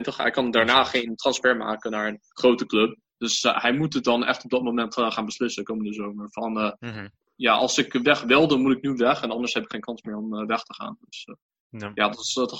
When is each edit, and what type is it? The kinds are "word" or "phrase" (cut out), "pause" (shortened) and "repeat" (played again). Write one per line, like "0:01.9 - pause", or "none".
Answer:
0:02.3 - pause